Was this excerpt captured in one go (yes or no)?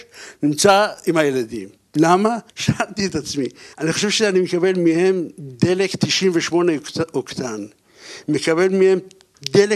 no